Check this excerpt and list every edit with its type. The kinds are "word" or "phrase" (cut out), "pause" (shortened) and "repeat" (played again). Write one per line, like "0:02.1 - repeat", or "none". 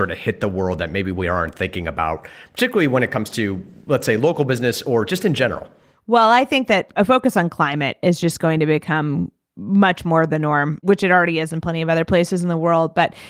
none